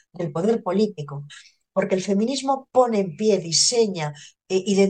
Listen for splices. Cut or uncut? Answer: uncut